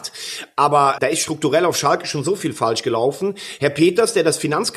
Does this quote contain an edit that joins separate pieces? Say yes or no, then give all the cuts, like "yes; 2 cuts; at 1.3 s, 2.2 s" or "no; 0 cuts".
yes; 1 cut; at 1.0 s